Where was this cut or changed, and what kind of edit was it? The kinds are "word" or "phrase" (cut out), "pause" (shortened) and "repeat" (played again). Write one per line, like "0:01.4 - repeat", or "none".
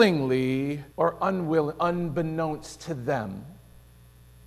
0:00.9 - pause